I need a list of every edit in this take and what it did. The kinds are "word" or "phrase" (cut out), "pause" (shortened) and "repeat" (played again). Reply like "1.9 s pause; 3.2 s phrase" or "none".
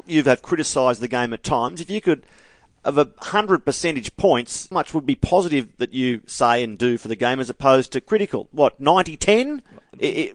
4.7 s word